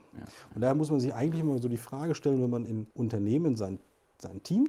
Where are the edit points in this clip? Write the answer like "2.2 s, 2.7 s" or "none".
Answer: 2.9 s